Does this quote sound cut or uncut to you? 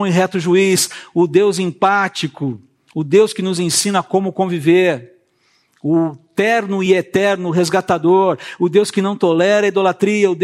uncut